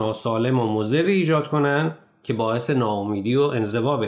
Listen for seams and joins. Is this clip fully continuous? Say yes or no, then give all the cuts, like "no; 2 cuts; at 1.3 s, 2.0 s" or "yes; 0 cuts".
yes; 0 cuts